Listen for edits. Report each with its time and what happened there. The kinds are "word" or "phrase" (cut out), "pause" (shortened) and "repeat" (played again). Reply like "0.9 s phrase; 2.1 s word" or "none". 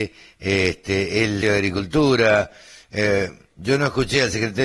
1.4 s word; 3.5 s word